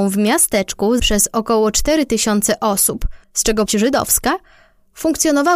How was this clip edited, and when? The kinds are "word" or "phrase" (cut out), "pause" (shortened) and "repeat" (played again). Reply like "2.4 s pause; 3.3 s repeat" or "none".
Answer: 1.0 s word; 3.2 s pause; 3.7 s phrase